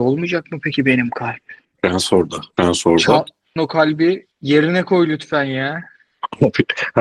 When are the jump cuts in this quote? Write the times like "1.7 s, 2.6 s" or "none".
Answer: 1.6 s, 2.5 s, 3.6 s, 4.3 s